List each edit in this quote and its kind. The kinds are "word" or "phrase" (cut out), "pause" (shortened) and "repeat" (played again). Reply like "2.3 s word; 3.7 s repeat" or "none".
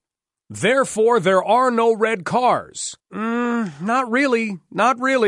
3.0 s pause